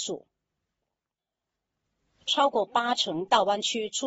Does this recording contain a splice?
no; 0 cuts

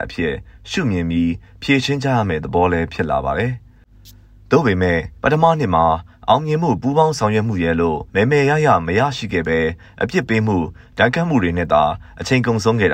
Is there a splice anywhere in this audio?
yes; 2 cuts; at 5.2 s, 8.1 s

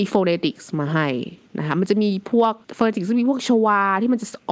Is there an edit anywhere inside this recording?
yes; 1 cut; at 2.6 s

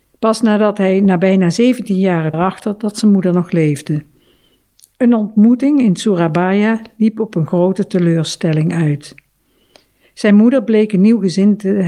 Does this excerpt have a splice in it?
yes; 1 cut; at 2.3 s

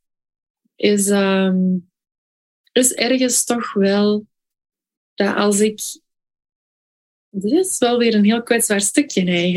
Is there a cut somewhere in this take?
no; 0 cuts

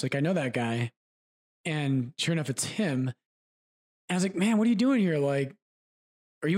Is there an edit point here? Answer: no; 0 cuts

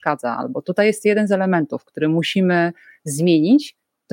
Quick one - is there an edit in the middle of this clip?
no; 0 cuts

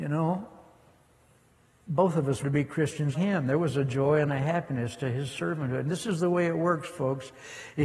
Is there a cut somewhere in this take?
yes; 2 cuts; at 2.4 s, 3.1 s

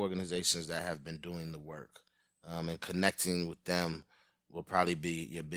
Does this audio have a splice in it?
no; 0 cuts

